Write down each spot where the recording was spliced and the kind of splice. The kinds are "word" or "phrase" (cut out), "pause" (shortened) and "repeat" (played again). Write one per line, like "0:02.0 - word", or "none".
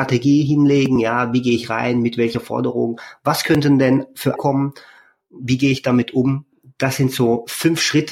0:04.4 - word